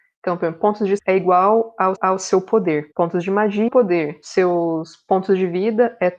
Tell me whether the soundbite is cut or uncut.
cut